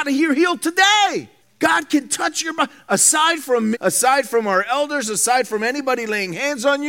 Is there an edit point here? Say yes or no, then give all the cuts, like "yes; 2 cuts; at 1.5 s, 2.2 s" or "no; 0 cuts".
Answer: yes; 2 cuts; at 1.4 s, 3.7 s